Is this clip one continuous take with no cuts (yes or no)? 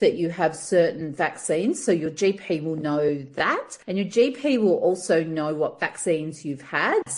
yes